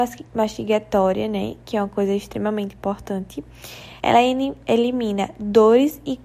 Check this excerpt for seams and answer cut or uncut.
cut